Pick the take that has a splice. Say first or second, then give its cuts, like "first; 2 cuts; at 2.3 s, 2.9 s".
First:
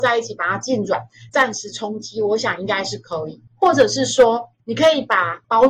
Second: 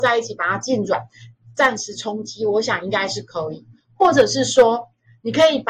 first; 3 cuts; at 1.3 s, 3.5 s, 4.6 s